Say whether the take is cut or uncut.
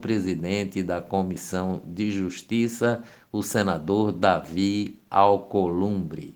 uncut